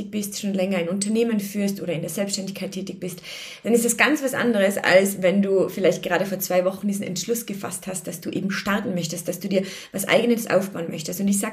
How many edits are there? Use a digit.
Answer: 0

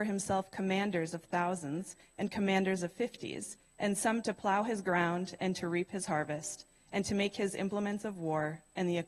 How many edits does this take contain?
0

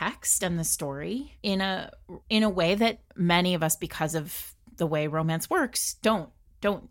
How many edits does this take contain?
2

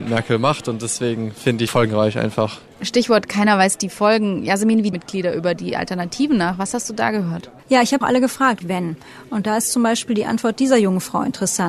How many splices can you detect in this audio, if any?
6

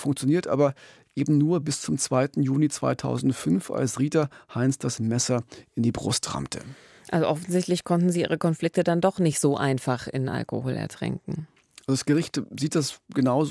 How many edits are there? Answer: 0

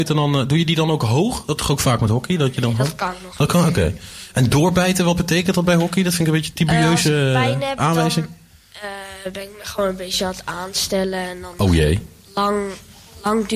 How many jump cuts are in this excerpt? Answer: 1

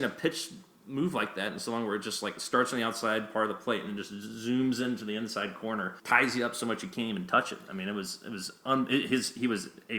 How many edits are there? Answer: 1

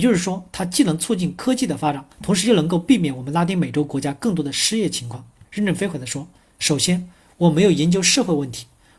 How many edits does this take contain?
2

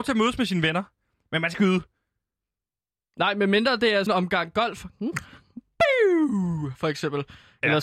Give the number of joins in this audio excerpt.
2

